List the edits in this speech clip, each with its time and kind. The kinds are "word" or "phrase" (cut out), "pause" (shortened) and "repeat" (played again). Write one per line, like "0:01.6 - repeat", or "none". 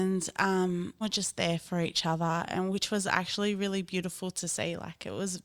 0:01.0 - word